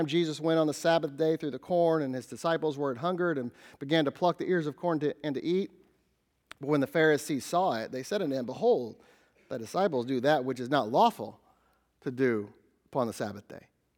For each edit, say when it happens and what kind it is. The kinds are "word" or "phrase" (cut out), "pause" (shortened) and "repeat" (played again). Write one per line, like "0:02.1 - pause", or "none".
none